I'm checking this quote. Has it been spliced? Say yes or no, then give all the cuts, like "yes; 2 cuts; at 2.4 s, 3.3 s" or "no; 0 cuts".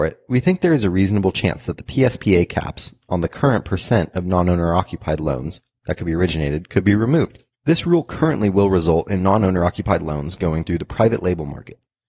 yes; 1 cut; at 7.5 s